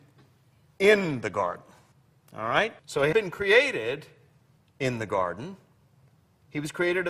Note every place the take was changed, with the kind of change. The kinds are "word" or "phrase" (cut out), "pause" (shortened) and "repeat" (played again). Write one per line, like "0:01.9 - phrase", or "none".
0:01.9 - pause
0:02.8 - pause
0:03.1 - word
0:04.6 - pause

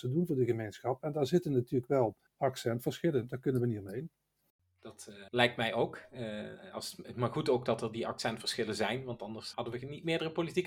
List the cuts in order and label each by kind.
0:02.3 - pause
0:05.3 - pause
0:09.5 - word

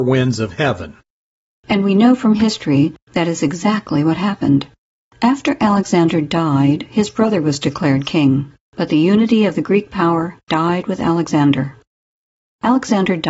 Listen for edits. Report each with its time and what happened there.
none

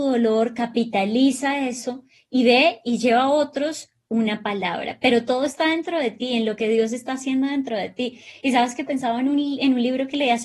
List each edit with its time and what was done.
0:08.9 - word

